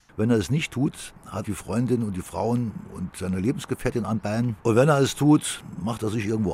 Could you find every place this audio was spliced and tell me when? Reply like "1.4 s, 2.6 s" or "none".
1.4 s, 4.6 s